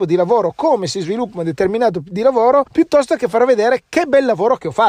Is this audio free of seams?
no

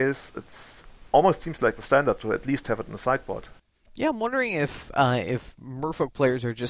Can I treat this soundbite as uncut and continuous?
yes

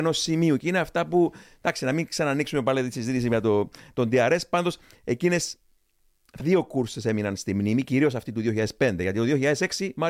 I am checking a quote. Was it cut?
yes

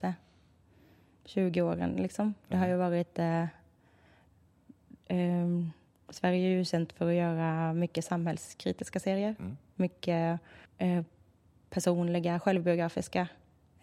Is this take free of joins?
no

